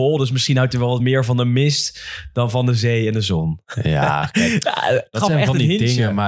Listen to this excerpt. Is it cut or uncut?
uncut